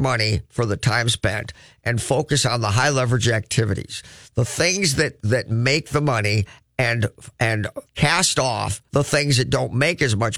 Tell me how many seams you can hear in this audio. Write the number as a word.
two